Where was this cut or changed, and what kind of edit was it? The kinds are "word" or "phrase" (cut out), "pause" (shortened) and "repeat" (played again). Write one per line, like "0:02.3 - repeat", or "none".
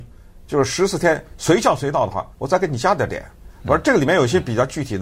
0:02.3 - pause